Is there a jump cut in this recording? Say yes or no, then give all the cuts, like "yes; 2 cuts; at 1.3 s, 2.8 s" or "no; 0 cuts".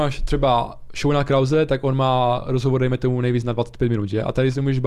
no; 0 cuts